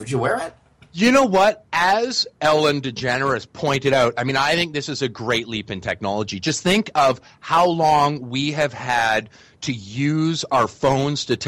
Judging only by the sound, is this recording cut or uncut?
uncut